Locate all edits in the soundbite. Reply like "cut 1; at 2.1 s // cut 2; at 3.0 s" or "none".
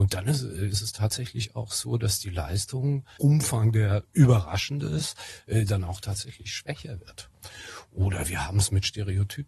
cut 1; at 3.2 s